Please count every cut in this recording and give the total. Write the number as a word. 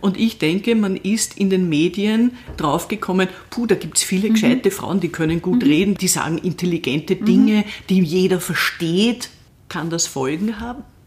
zero